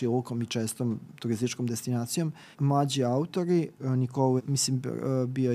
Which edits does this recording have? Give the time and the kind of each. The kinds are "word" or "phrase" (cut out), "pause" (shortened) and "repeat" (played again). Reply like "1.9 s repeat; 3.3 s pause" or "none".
2.5 s word; 3.8 s word; 4.4 s word